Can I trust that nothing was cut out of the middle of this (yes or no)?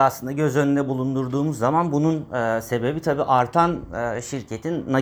yes